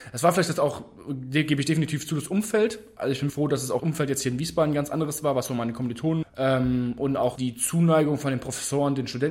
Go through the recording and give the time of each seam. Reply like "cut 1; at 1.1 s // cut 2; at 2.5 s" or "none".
cut 1; at 3.3 s // cut 2; at 3.8 s // cut 3; at 6.2 s // cut 4; at 7.4 s